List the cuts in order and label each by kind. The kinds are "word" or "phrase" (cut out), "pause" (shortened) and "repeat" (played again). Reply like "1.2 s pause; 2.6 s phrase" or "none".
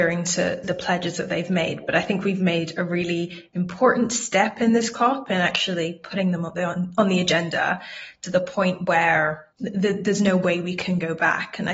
9.5 s pause